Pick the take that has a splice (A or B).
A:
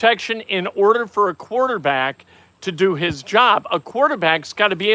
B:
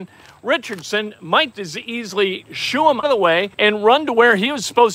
B